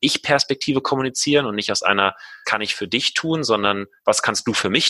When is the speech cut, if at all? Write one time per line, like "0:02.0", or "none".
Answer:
0:02.4

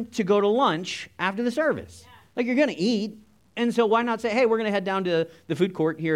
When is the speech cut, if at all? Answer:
none

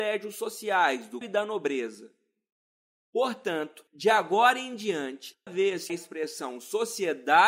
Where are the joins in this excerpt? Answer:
0:01.2
0:05.5
0:05.9

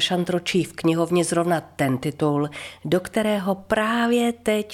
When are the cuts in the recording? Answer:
none

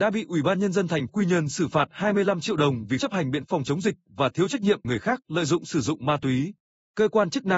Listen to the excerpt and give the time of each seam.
0:01.1
0:03.0
0:03.4
0:04.8

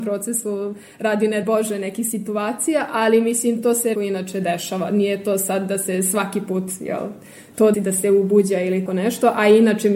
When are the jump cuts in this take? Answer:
0:01.4
0:03.9
0:07.7
0:08.9

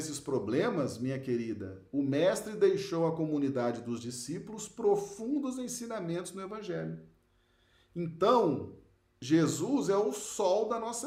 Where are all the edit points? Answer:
none

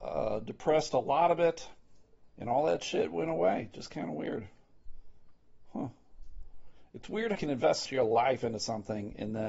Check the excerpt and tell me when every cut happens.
0:02.3
0:07.3
0:07.8

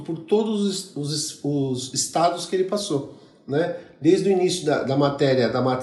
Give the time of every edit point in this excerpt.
none

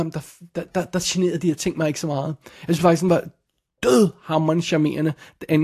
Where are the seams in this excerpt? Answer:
none

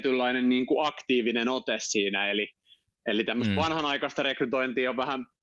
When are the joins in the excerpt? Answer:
none

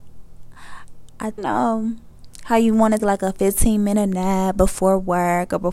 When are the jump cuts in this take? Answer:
0:01.4
0:03.0

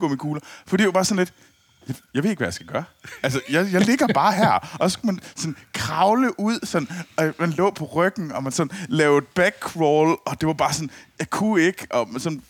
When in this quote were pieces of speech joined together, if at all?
none

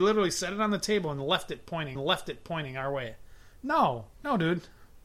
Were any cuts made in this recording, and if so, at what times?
0:02.0
0:04.1

